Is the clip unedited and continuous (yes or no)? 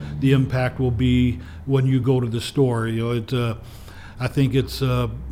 yes